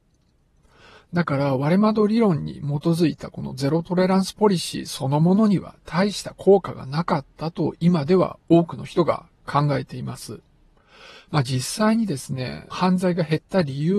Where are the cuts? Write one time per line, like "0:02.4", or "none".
0:10.8
0:12.7